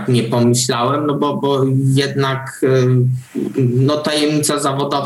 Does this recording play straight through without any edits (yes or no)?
yes